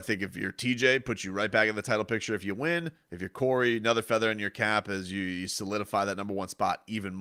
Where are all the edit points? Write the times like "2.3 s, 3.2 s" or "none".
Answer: none

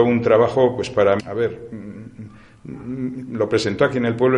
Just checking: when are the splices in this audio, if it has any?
1.2 s, 3.3 s

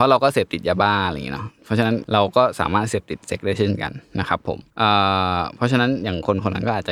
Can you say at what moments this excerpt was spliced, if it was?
4.7 s

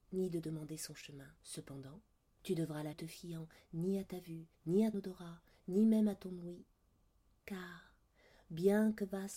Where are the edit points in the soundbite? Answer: 1.4 s, 2.9 s, 4.5 s, 4.9 s

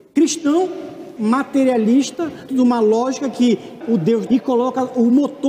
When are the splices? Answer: 1.2 s, 2.5 s, 3.8 s, 4.3 s

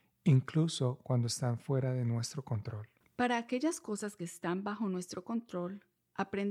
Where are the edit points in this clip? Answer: none

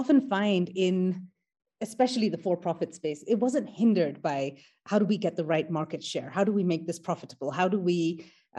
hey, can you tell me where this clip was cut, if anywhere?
none

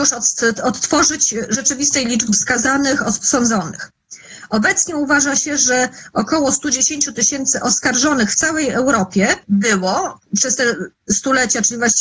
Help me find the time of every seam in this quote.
2.3 s

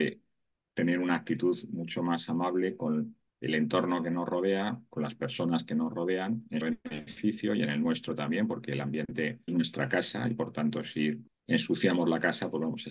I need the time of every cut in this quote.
3.3 s, 6.6 s, 9.5 s, 11.3 s

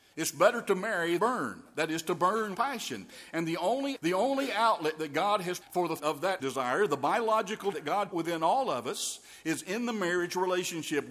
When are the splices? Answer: 1.2 s, 2.5 s, 3.9 s, 5.6 s, 6.0 s, 6.4 s, 7.7 s, 8.1 s

